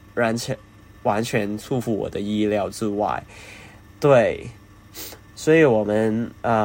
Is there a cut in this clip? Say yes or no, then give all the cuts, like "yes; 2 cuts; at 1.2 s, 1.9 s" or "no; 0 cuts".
no; 0 cuts